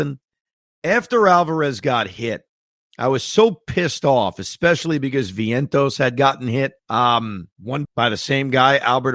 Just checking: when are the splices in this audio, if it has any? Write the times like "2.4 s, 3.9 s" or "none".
6.8 s, 7.8 s